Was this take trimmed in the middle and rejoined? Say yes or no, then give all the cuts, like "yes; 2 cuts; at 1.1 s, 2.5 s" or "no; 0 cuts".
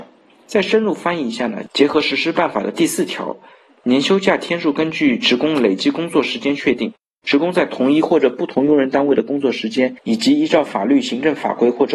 no; 0 cuts